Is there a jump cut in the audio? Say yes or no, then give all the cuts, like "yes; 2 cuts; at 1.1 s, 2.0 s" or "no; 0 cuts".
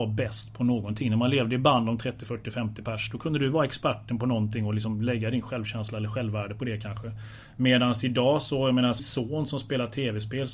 yes; 1 cut; at 9.0 s